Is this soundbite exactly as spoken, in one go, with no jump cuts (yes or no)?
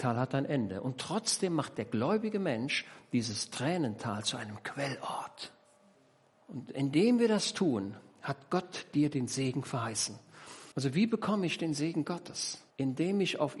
no